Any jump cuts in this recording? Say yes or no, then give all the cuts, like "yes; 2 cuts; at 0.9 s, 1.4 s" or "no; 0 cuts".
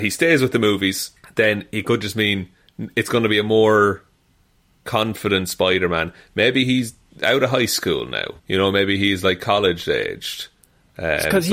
yes; 2 cuts; at 1.2 s, 8.4 s